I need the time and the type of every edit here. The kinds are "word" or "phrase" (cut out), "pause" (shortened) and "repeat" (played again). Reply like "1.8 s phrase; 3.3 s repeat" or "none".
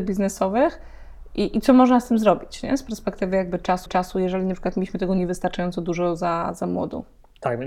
3.9 s repeat